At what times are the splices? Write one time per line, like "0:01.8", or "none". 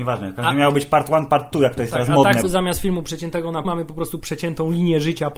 0:02.4
0:03.6